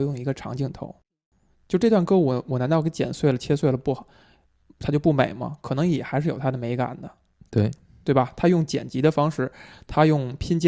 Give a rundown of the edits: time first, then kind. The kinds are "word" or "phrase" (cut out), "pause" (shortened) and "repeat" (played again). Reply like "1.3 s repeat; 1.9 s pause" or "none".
none